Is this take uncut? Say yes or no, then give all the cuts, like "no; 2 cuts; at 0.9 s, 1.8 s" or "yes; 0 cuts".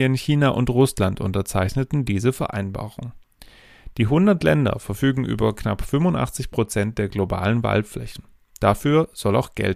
yes; 0 cuts